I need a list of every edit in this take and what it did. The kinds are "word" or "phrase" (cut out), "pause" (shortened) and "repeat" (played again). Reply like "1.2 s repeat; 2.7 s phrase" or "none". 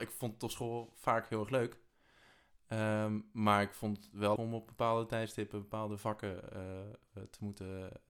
4.4 s word